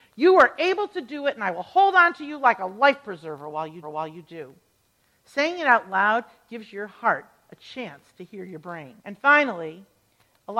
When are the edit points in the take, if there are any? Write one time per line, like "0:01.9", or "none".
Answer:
0:03.8
0:09.0